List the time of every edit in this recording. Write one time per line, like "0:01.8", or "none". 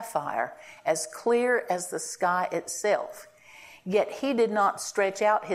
none